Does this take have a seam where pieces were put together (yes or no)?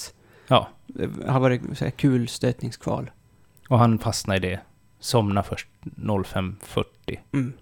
no